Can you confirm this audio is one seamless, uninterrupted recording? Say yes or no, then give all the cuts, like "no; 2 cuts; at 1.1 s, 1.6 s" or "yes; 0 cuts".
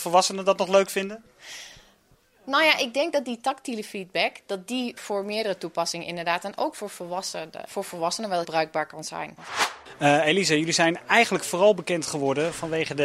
no; 3 cuts; at 5.0 s, 7.7 s, 8.4 s